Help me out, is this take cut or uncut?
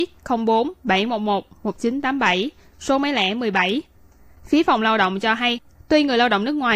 uncut